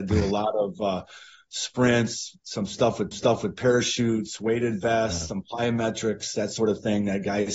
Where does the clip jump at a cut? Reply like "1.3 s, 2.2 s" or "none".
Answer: 3.1 s